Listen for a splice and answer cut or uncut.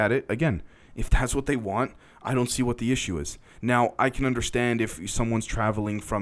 uncut